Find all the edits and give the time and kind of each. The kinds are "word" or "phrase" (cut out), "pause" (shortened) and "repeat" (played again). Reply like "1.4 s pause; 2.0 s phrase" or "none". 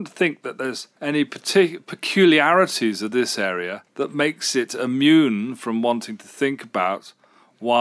1.0 s pause; 3.9 s pause